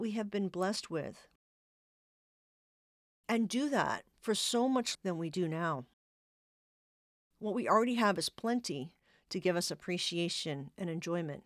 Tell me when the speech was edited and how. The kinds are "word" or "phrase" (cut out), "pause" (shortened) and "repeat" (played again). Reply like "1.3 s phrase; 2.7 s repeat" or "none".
4.9 s word

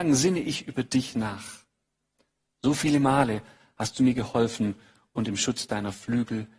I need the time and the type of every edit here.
none

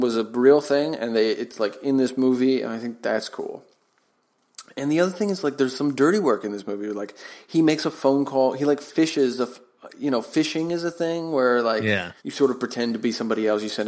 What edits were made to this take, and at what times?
12.2 s pause

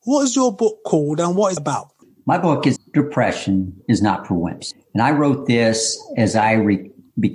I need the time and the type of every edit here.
1.6 s word; 2.8 s phrase; 3.8 s pause

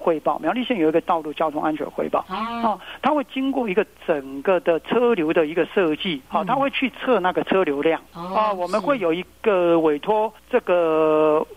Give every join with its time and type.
6.3 s pause; 8.1 s pause; 10.4 s pause

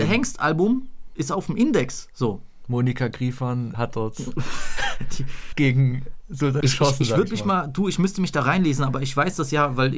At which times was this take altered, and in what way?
3.7 s word; 5.5 s word; 6.6 s word

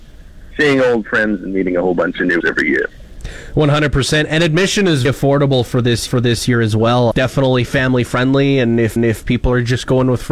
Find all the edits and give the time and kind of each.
2.4 s word; 5.0 s word; 6.1 s repeat; 7.1 s phrase; 9.0 s repeat

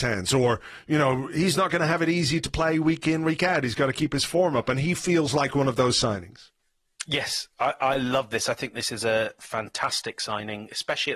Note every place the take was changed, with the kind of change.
none

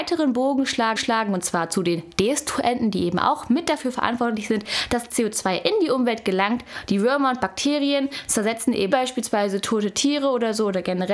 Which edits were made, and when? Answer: 1.0 s repeat; 8.9 s phrase

